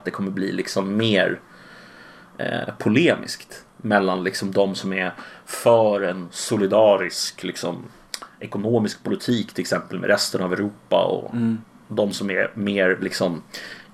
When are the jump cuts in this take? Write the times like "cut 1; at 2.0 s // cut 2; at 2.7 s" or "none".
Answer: none